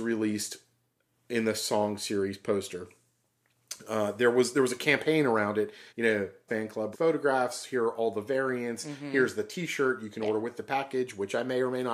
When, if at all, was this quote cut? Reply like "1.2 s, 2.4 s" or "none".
5.9 s, 6.5 s, 6.9 s